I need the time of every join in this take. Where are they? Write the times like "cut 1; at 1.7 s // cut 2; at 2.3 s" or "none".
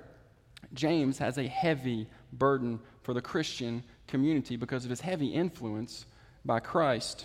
none